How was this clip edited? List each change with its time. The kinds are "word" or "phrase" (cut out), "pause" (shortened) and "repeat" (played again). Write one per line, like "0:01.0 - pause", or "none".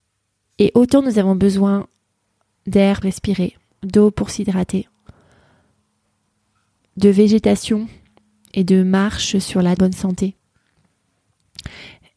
0:03.0 - word
0:09.8 - phrase